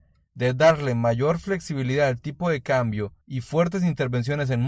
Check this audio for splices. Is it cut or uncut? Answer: cut